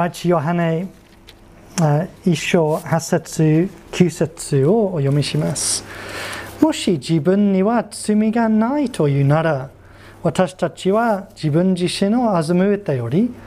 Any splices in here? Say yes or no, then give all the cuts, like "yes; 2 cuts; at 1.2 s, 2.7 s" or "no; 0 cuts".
yes; 1 cut; at 2.2 s